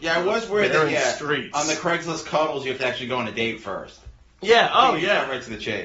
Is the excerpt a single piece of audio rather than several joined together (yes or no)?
yes